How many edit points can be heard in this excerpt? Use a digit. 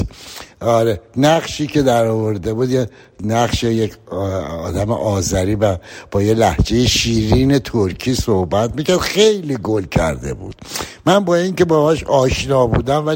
0